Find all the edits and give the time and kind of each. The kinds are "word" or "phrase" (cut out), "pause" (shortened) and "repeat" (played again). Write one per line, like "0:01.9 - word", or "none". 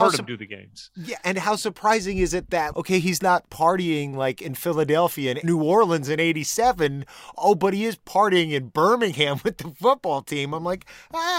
0:02.7 - word
0:05.4 - phrase